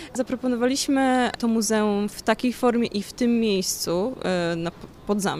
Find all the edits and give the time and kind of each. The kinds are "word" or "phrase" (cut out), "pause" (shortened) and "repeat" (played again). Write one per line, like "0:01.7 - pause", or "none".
none